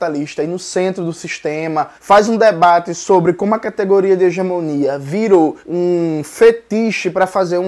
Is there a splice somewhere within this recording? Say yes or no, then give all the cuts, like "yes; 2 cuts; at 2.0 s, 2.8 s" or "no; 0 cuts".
yes; 2 cuts; at 2.0 s, 5.6 s